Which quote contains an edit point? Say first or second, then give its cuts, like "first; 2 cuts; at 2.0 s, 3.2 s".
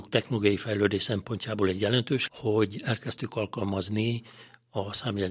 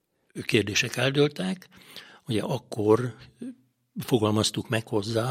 first; 1 cut; at 2.3 s